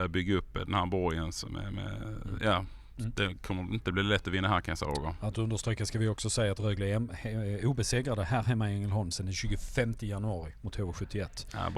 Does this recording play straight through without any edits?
yes; 0 cuts

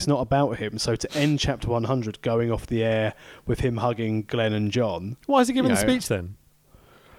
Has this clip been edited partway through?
no; 0 cuts

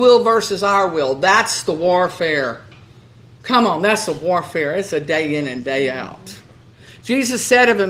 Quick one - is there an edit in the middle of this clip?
no; 0 cuts

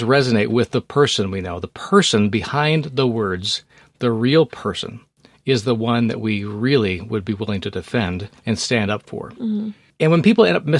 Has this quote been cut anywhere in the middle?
yes; 1 cut; at 8.4 s

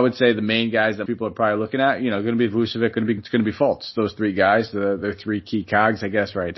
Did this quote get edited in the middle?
yes; 2 cuts; at 1.1 s, 3.2 s

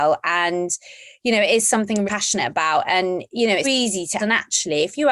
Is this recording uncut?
no; 3 cuts; at 2.1 s, 3.6 s, 4.2 s

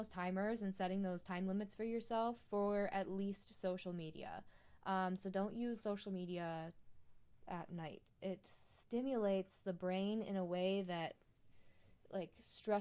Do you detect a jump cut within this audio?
no; 0 cuts

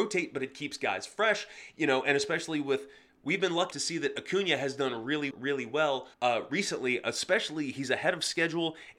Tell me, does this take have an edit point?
yes; 3 cuts; at 3.7 s, 5.3 s, 6.1 s

